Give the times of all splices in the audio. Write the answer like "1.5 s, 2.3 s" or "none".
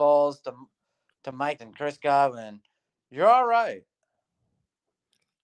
1.6 s